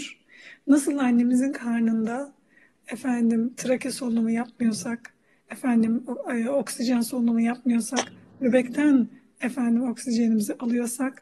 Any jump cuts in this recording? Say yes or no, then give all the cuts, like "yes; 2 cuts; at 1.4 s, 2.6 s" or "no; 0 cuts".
no; 0 cuts